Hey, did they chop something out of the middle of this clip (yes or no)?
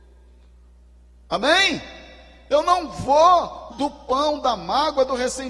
yes